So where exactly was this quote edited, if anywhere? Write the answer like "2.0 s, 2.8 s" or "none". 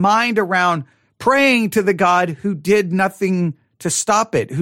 none